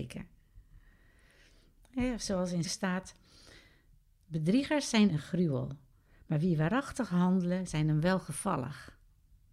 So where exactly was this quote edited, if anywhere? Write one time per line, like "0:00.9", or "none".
0:02.6
0:05.1

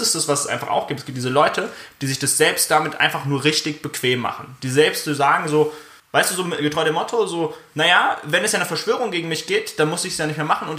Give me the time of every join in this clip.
0:06.0

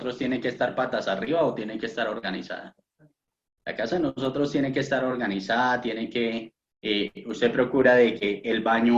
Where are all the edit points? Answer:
none

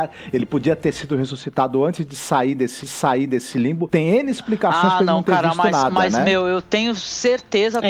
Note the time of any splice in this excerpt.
0:02.8

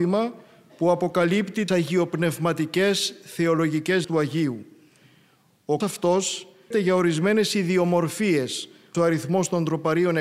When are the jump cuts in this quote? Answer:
0:01.7
0:04.0
0:05.8
0:06.7
0:08.9

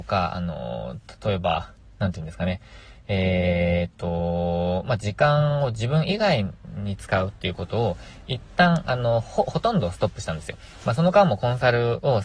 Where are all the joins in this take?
none

